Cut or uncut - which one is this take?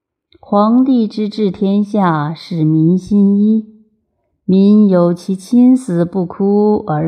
uncut